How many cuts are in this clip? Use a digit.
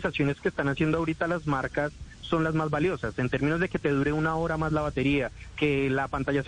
0